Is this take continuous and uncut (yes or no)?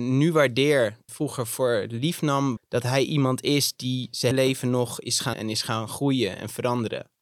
no